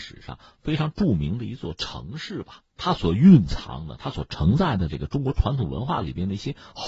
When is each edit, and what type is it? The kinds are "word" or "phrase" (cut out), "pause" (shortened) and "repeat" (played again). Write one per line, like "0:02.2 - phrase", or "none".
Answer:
0:02.7 - pause